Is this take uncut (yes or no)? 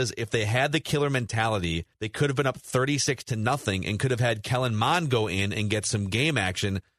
no